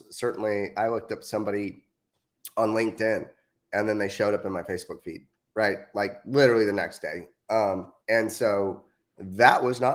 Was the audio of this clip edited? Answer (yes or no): yes